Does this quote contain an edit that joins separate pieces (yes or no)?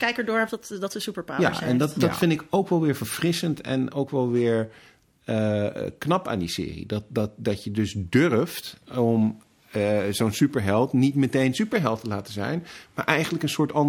no